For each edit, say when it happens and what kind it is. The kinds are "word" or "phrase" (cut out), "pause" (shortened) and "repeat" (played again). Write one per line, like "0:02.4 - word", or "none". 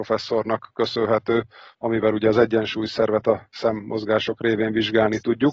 none